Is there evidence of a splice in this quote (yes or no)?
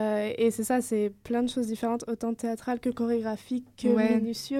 no